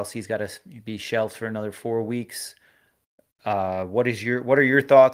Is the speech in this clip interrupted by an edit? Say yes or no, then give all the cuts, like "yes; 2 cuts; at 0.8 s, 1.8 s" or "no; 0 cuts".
no; 0 cuts